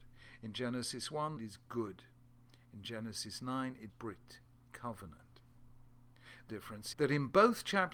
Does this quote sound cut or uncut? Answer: cut